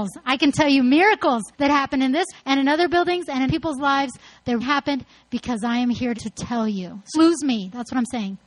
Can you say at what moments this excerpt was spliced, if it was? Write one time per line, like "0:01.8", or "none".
0:01.5
0:02.3
0:03.5
0:04.6
0:06.1
0:07.1